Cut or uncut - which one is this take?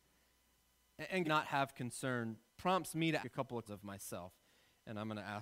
cut